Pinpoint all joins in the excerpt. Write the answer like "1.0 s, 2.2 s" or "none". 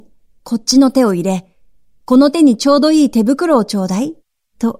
none